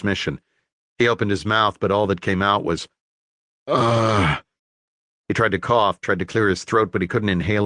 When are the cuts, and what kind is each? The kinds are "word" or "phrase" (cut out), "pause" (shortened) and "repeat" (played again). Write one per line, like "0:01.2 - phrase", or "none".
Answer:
none

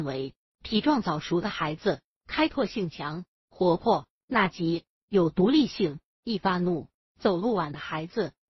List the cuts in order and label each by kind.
none

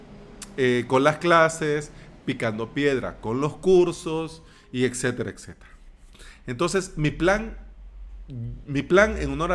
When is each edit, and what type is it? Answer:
none

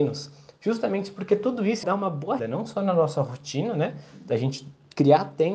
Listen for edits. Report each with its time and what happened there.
0:01.8 - word
0:02.4 - word

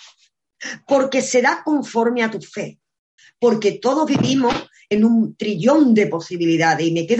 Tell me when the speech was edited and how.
0:03.2 - pause

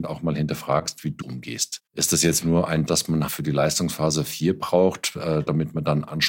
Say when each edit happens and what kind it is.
0:01.2 - phrase
0:01.9 - pause
0:02.4 - word
0:02.9 - word
0:03.3 - word

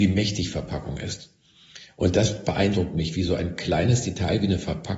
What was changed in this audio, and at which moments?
none

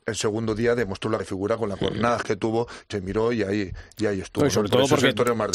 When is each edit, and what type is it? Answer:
0:01.2 - word
0:02.2 - word
0:02.9 - word

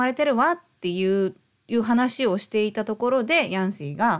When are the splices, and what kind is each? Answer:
0:01.6 - pause

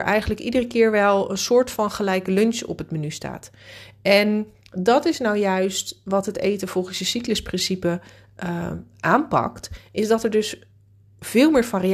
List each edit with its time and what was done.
none

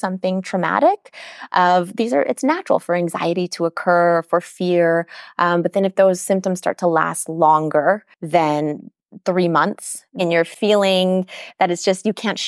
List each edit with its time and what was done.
0:08.1 - pause

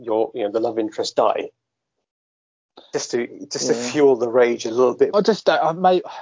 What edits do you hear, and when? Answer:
0:05.1 - phrase

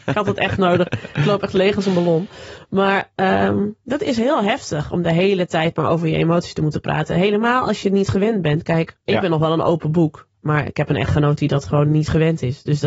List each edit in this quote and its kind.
0:09.0 - pause

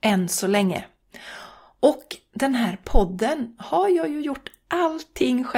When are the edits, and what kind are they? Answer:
none

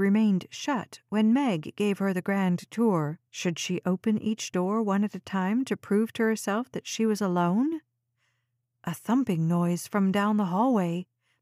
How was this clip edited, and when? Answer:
0:03.3 - pause

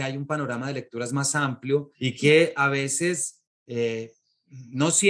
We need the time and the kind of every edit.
0:01.9 - pause

